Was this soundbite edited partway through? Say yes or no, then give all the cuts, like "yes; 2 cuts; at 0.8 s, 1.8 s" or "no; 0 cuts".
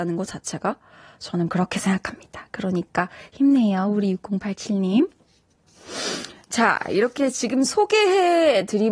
no; 0 cuts